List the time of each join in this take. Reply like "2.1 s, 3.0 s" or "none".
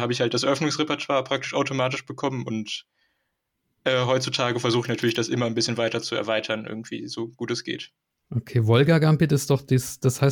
none